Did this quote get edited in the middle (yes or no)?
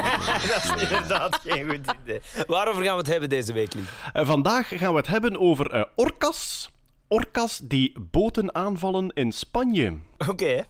no